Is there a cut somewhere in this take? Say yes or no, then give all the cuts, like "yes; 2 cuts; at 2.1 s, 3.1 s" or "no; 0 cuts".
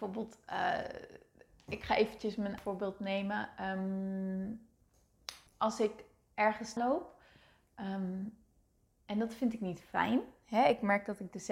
yes; 3 cuts; at 2.6 s, 5.5 s, 6.8 s